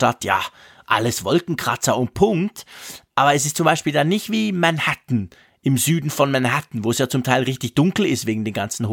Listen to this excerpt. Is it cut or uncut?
uncut